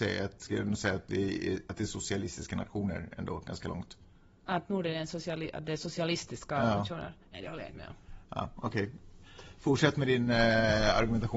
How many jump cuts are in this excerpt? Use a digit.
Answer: 0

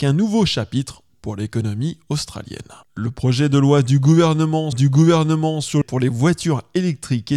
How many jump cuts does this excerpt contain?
4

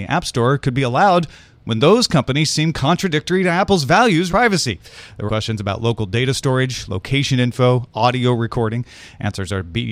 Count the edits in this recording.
2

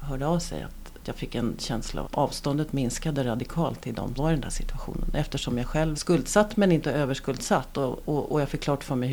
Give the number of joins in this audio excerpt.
5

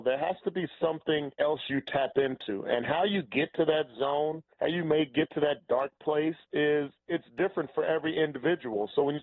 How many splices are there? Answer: 3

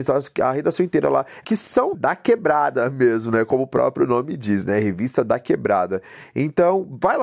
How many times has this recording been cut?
2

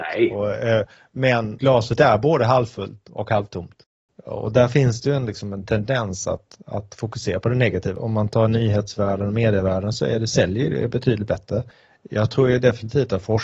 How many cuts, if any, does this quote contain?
0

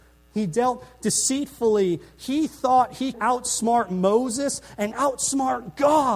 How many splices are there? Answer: 2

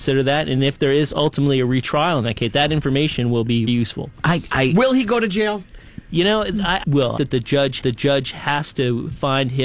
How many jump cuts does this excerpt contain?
5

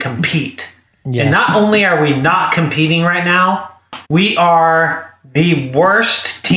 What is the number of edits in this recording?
1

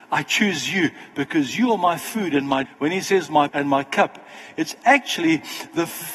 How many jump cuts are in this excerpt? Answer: 2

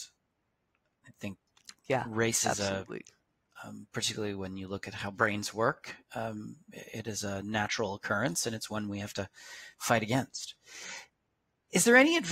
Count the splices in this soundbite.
0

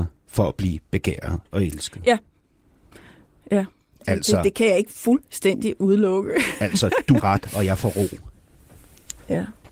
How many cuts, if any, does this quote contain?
1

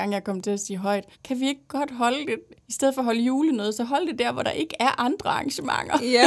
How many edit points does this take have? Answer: 1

